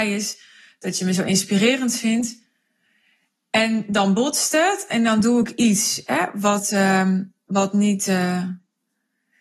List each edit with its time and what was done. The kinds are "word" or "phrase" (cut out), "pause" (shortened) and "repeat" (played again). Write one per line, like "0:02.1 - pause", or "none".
none